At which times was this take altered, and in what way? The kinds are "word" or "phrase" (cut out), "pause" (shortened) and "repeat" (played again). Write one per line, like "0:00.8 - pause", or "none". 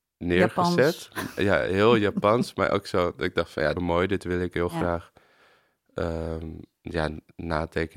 0:03.7 - phrase